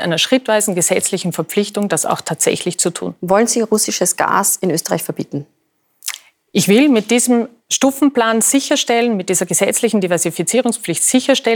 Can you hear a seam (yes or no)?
no